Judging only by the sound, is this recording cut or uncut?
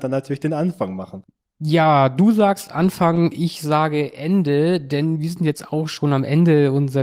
uncut